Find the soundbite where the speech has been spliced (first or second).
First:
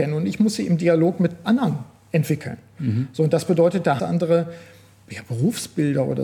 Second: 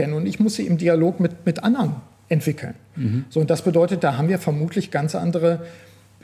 first